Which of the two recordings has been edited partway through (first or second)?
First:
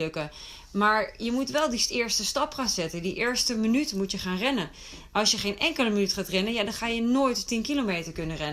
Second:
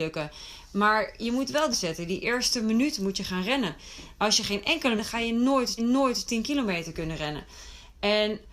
second